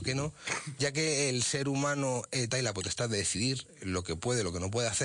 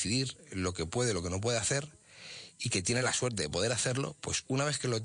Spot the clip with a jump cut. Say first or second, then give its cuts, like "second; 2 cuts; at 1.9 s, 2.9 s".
first; 1 cut; at 2.5 s